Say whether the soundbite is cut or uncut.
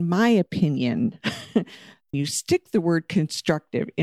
cut